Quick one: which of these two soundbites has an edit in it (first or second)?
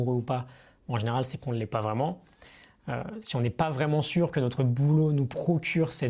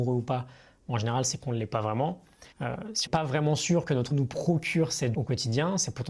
second